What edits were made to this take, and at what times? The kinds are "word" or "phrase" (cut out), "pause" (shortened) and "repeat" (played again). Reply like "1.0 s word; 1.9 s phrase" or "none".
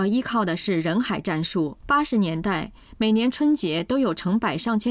1.8 s pause